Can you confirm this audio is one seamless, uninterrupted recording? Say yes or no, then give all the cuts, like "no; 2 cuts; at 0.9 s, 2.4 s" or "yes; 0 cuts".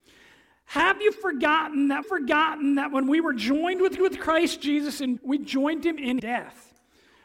no; 4 cuts; at 2.0 s, 4.0 s, 5.2 s, 6.2 s